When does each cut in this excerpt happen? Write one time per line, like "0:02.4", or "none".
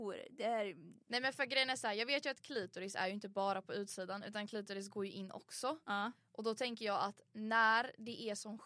none